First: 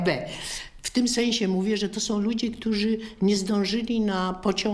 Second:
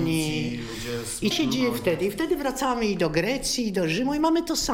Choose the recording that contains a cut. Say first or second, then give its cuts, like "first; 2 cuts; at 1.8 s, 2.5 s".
second; 1 cut; at 1.3 s